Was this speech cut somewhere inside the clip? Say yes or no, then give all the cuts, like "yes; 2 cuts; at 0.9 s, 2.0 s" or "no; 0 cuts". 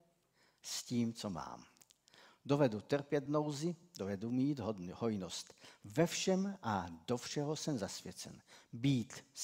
no; 0 cuts